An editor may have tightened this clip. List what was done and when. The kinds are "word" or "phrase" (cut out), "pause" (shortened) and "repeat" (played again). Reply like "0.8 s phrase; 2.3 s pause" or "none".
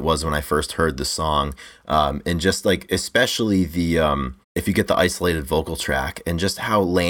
4.4 s pause